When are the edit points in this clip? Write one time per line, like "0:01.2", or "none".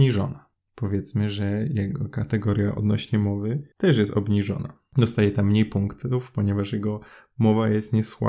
0:03.7